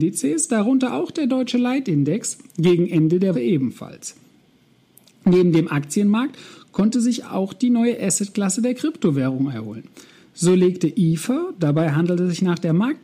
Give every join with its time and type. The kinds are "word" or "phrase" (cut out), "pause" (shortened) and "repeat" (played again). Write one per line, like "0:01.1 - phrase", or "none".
0:03.3 - word